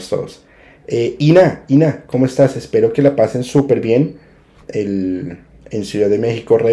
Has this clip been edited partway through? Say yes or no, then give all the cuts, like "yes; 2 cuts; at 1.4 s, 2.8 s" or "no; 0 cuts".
no; 0 cuts